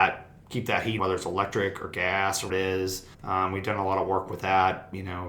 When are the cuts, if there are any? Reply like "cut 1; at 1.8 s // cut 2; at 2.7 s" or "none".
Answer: cut 1; at 1.0 s // cut 2; at 2.5 s // cut 3; at 3.1 s

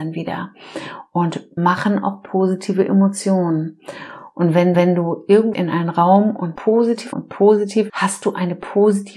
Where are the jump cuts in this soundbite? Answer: cut 1; at 1.6 s // cut 2; at 4.7 s // cut 3; at 5.5 s // cut 4; at 6.6 s // cut 5; at 7.1 s // cut 6; at 7.9 s

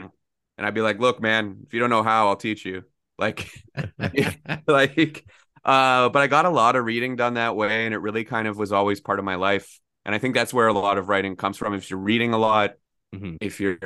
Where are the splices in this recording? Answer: none

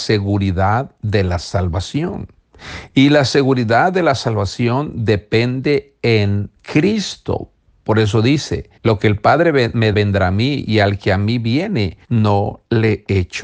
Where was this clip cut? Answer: cut 1; at 6.6 s // cut 2; at 8.8 s // cut 3; at 9.9 s // cut 4; at 12.0 s

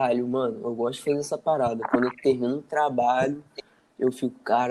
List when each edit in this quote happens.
none

